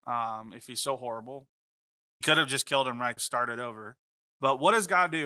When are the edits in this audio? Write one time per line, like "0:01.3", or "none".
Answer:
0:02.2
0:03.2